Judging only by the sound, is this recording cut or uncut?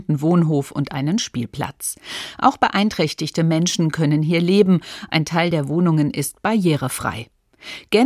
uncut